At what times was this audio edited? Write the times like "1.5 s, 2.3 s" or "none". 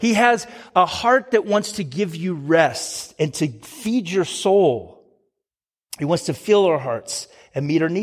none

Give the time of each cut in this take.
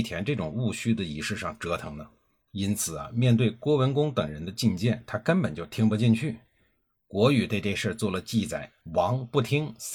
8.8 s

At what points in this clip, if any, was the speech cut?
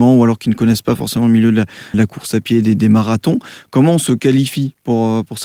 1.9 s

